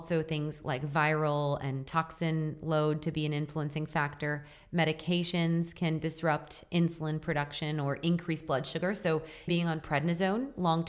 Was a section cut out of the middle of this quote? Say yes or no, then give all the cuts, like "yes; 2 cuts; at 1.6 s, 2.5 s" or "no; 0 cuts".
yes; 1 cut; at 9.5 s